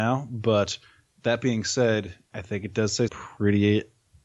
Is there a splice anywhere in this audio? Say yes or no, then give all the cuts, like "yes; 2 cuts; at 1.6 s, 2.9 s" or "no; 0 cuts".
yes; 2 cuts; at 2.3 s, 3.1 s